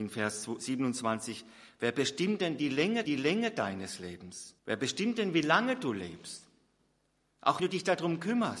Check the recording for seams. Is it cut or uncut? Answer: cut